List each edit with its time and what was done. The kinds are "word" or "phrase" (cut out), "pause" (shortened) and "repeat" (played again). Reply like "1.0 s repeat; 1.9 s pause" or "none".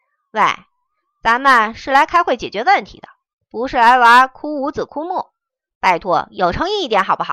none